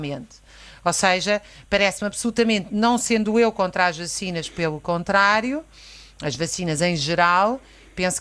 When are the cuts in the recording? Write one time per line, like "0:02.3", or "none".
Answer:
none